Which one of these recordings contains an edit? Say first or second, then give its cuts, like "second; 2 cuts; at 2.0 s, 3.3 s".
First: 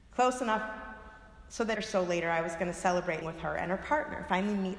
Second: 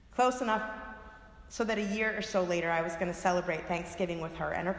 first; 2 cuts; at 1.8 s, 3.2 s